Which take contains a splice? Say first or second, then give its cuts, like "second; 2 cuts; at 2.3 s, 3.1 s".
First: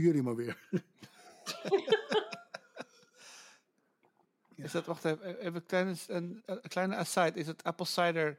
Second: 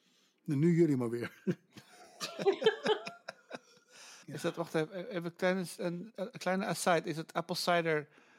second; 1 cut; at 4.2 s